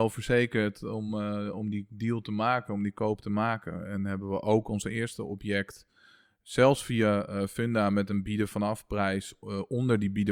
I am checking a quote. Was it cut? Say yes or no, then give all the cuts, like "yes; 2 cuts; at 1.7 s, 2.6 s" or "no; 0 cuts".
no; 0 cuts